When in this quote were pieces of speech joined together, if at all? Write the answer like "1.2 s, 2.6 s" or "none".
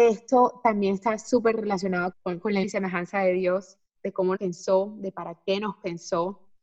2.1 s, 2.6 s, 4.0 s, 4.4 s